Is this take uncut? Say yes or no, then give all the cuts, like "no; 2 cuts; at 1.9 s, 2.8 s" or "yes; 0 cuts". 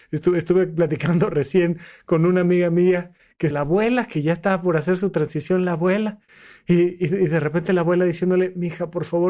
no; 1 cut; at 3.5 s